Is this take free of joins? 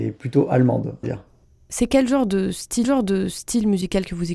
no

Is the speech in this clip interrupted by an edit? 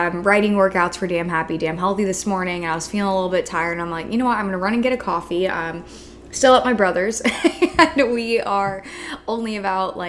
no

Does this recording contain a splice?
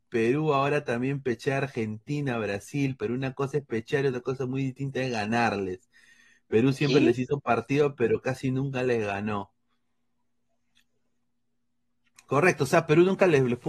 no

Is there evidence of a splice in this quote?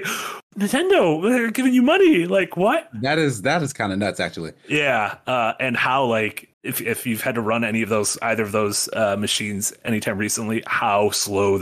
yes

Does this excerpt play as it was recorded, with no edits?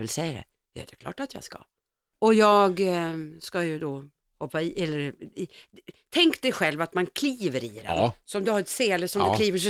yes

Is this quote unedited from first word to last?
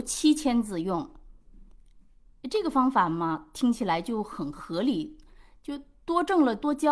yes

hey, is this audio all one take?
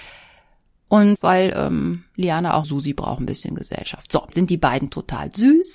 no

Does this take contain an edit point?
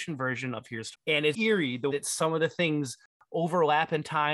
yes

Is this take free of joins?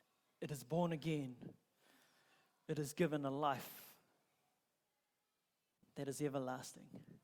yes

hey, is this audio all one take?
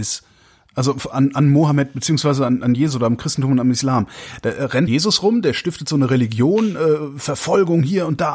no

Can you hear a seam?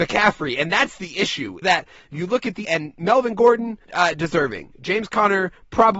yes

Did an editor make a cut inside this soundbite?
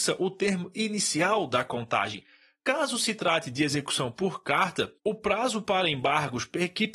yes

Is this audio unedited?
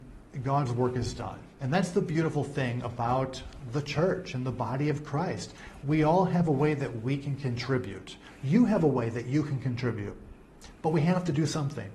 no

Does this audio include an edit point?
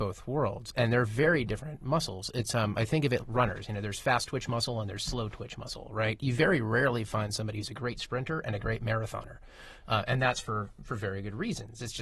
yes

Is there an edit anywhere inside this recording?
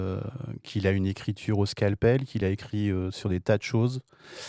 no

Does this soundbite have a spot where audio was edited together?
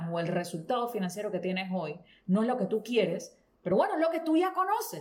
no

